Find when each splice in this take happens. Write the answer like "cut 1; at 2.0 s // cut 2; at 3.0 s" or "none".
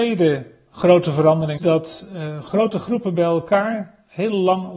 cut 1; at 1.6 s